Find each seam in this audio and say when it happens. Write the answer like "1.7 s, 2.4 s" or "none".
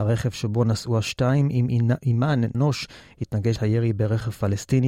2.5 s, 3.6 s